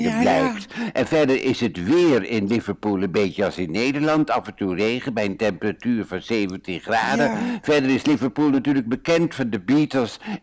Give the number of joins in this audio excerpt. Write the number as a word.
zero